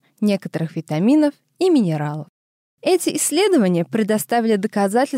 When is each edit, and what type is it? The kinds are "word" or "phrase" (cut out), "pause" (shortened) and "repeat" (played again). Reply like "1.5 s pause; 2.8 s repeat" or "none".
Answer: none